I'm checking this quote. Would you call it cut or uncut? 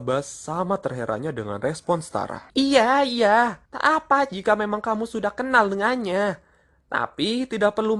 cut